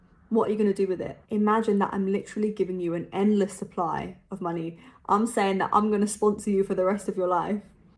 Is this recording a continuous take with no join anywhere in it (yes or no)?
no